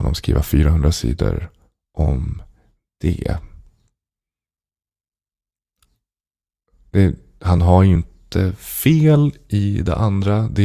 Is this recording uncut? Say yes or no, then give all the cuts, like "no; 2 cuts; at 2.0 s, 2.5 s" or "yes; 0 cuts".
yes; 0 cuts